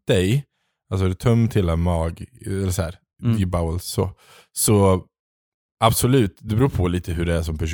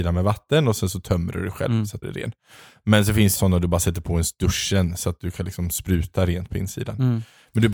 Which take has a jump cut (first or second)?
second